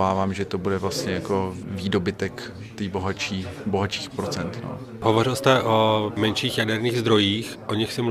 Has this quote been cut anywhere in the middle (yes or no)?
yes